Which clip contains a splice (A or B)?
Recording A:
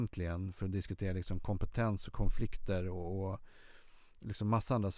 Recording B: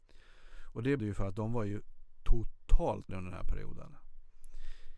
B